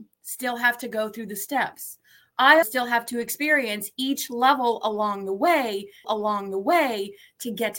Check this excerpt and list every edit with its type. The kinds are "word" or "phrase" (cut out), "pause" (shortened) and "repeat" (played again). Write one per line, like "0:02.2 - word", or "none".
0:02.6 - word
0:06.0 - repeat